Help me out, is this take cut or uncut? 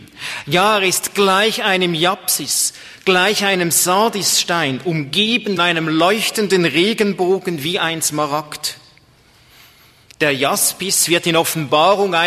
cut